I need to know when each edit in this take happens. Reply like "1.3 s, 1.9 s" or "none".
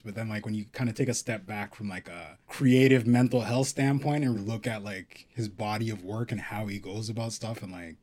2.4 s, 4.3 s